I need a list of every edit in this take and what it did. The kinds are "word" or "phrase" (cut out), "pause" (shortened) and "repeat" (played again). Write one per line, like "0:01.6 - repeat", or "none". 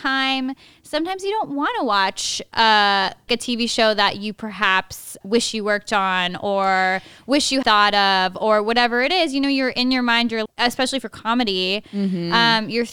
0:03.3 - word
0:05.2 - word
0:07.6 - word
0:10.5 - word